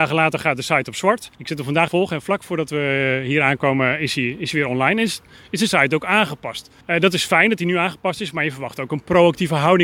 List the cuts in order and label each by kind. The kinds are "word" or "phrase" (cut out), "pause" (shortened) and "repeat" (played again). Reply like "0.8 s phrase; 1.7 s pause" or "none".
1.3 s pause; 1.9 s phrase; 6.8 s pause